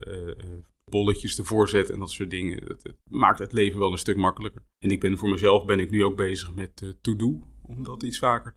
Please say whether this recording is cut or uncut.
cut